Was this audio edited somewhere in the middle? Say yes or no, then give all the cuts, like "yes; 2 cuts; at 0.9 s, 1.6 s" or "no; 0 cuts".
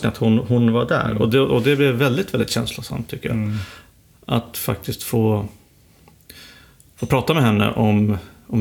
no; 0 cuts